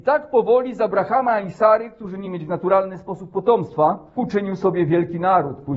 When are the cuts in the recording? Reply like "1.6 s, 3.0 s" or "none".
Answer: 2.2 s, 4.2 s